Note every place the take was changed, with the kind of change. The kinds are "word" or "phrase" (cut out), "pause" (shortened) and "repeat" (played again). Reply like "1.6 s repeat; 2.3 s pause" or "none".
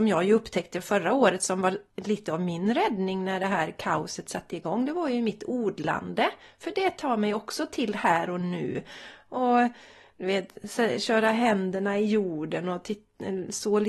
1.9 s pause

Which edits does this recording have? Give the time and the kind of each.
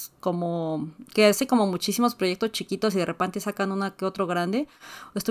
none

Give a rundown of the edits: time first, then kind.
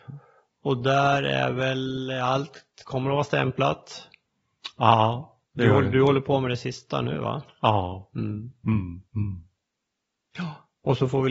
5.4 s pause; 9.1 s pause

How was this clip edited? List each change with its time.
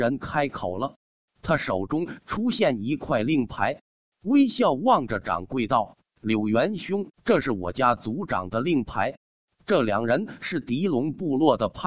7.1 s pause

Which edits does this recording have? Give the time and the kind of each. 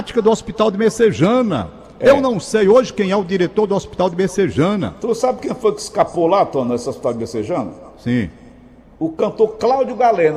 none

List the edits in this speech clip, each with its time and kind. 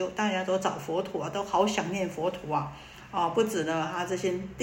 none

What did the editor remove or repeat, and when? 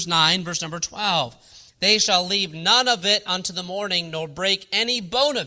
none

